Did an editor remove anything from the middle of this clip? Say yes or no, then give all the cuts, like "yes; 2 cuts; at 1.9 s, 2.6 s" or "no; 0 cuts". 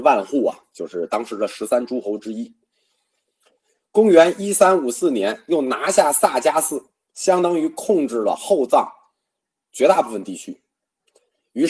no; 0 cuts